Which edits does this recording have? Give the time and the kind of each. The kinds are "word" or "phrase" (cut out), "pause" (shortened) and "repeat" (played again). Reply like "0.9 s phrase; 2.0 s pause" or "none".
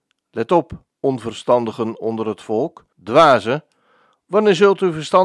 0.9 s pause; 2.9 s pause